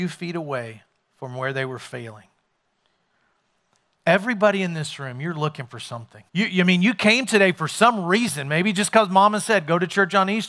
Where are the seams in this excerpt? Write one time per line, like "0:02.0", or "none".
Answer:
0:06.3